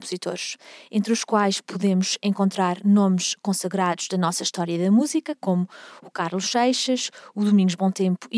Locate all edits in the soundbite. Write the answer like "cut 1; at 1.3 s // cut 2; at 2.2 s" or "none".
none